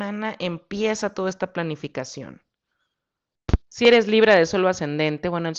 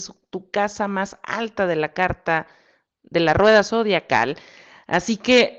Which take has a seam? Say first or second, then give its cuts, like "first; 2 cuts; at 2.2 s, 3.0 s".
first; 1 cut; at 3.6 s